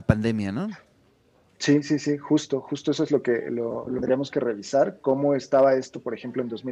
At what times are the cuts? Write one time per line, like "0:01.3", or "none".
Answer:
none